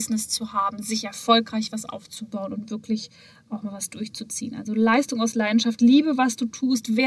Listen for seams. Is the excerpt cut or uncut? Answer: uncut